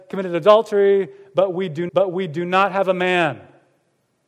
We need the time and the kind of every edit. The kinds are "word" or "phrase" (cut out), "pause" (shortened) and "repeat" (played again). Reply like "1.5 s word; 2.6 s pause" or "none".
1.9 s repeat